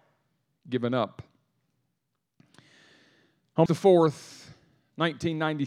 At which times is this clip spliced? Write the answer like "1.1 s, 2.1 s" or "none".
3.7 s